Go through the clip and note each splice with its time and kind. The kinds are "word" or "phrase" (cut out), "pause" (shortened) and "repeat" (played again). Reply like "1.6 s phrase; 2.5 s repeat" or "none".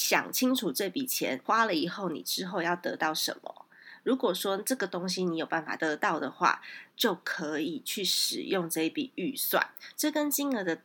6.9 s pause